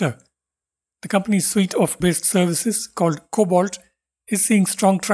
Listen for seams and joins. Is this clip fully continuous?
no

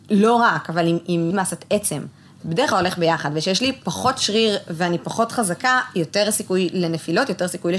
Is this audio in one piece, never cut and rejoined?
no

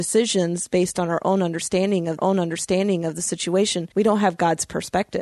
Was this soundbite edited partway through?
yes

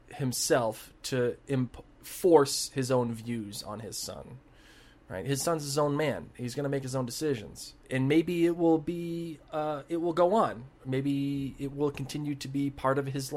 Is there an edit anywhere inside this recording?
yes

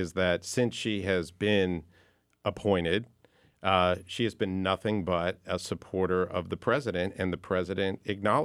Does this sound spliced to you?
no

